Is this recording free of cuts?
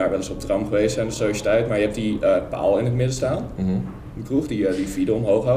yes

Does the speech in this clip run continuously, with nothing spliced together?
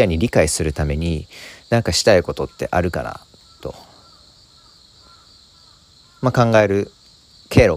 yes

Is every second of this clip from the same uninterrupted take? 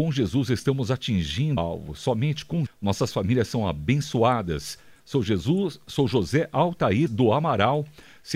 no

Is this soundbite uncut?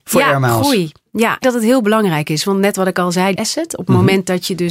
no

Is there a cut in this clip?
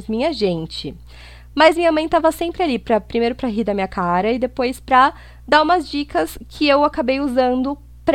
no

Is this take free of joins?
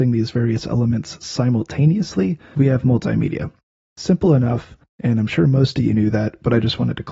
yes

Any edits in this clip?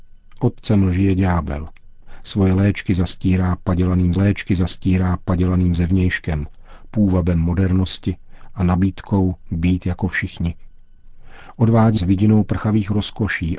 yes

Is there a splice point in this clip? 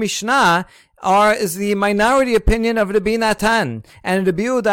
no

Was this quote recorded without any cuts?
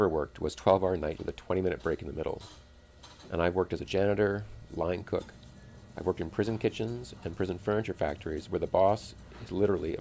no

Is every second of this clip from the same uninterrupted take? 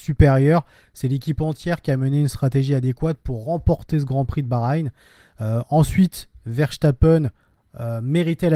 yes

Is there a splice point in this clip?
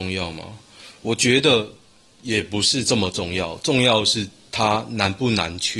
no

